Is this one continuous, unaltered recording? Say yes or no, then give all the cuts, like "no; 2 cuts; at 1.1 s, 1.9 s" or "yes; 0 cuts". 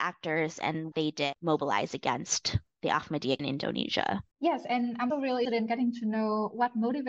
no; 5 cuts; at 0.9 s, 3.4 s, 4.3 s, 5.1 s, 5.4 s